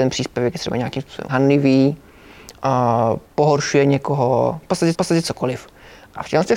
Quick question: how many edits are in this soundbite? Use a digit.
3